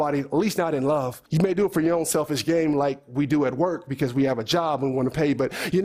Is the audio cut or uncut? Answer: cut